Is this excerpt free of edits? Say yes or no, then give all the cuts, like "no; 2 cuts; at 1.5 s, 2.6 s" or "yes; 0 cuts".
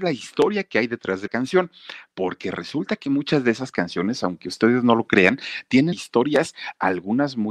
no; 2 cuts; at 1.3 s, 5.9 s